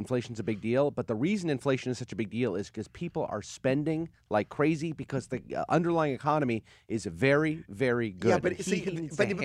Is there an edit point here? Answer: no; 0 cuts

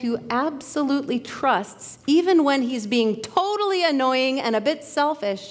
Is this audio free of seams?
yes; 0 cuts

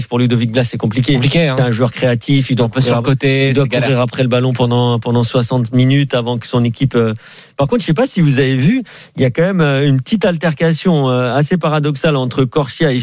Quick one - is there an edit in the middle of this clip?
no; 0 cuts

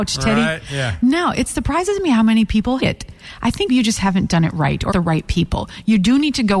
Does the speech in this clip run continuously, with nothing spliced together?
no; 3 cuts; at 2.8 s, 3.7 s, 4.9 s

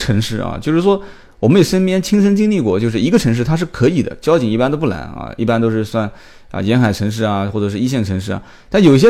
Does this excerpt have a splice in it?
no; 0 cuts

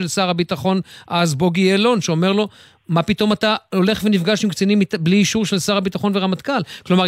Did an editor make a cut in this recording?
no; 0 cuts

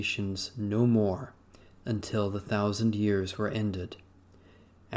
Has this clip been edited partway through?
no; 0 cuts

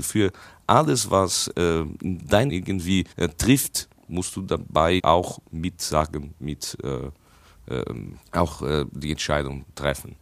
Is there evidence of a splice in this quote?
yes; 5 cuts; at 2.5 s, 3.1 s, 4.0 s, 5.0 s, 8.2 s

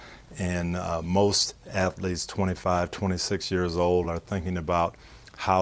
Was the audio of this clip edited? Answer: no; 0 cuts

